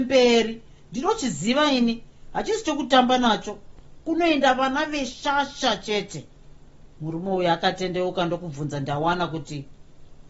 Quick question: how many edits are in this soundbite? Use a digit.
0